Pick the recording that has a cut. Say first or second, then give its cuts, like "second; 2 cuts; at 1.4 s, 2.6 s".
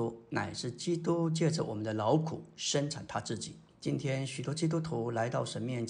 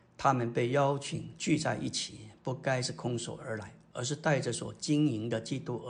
first; 1 cut; at 3.7 s